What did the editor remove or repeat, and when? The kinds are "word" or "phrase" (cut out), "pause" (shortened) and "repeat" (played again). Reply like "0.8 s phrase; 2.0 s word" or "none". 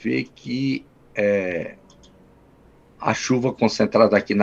none